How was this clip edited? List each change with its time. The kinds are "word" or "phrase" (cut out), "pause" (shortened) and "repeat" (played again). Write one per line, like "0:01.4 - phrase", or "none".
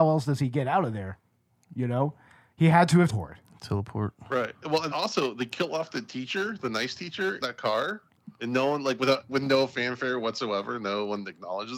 0:03.1 - word
0:04.9 - word
0:07.4 - word
0:09.3 - word